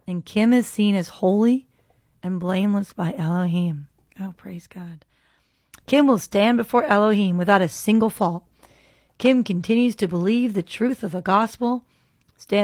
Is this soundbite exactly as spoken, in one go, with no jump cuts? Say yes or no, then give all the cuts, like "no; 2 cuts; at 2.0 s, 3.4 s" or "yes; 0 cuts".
yes; 0 cuts